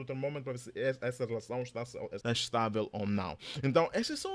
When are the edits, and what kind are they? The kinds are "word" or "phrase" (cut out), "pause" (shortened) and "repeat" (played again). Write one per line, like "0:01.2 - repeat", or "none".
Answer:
0:02.2 - word